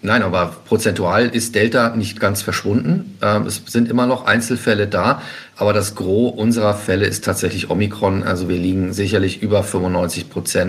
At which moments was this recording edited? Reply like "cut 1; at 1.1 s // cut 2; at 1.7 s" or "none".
none